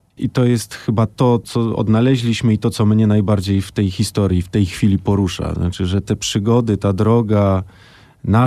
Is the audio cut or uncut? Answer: uncut